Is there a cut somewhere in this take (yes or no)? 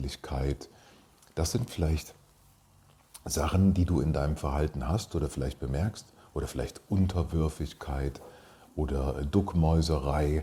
no